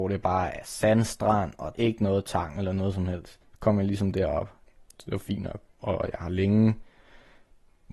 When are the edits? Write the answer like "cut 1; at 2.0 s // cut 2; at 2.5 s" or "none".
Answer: cut 1; at 1.7 s // cut 2; at 3.4 s // cut 3; at 4.6 s // cut 4; at 5.7 s